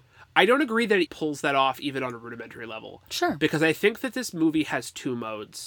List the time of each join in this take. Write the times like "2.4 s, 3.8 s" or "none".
1.1 s